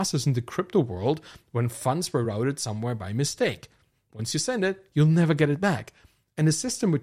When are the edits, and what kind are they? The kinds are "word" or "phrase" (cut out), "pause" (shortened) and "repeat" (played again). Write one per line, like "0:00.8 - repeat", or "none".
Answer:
none